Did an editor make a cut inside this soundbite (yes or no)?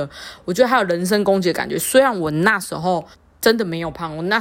yes